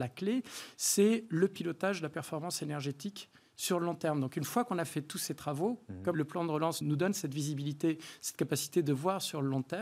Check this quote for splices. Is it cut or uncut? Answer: cut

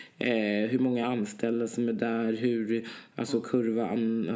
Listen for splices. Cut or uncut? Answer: uncut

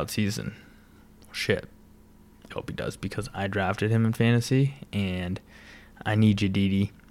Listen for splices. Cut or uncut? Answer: cut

